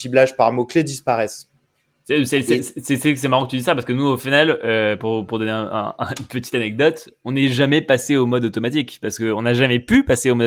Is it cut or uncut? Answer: uncut